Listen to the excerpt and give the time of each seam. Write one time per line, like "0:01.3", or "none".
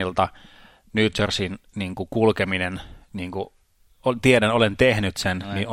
none